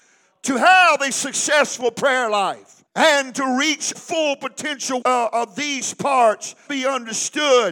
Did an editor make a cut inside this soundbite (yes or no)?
yes